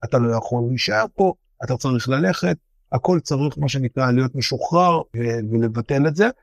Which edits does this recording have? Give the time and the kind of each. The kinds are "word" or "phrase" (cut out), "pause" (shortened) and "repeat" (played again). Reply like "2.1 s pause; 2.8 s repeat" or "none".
none